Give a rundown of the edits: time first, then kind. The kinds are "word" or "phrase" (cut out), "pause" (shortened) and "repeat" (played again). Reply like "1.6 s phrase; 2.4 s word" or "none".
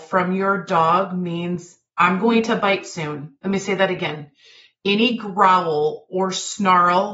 1.9 s pause; 3.4 s pause